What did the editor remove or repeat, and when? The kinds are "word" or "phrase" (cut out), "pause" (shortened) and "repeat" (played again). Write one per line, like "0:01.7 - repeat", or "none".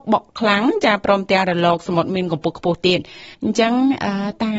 0:03.3 - pause